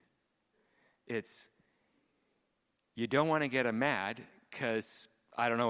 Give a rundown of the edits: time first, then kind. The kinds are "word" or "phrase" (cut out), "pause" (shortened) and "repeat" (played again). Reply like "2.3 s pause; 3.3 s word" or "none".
none